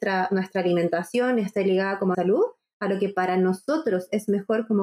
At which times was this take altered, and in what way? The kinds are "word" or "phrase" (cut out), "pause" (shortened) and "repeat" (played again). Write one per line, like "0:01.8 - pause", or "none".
0:02.1 - phrase